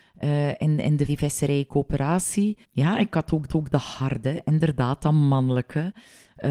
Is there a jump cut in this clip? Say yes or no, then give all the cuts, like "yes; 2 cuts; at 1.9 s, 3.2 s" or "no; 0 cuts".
yes; 3 cuts; at 1.1 s, 2.6 s, 3.5 s